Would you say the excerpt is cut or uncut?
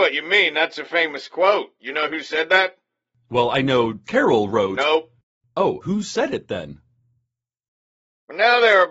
cut